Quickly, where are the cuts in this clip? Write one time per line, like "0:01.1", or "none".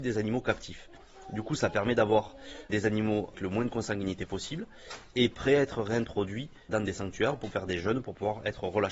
0:02.7
0:03.3
0:06.7
0:07.5